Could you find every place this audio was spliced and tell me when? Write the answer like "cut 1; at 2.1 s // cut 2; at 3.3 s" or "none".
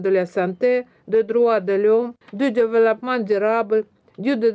cut 1; at 2.2 s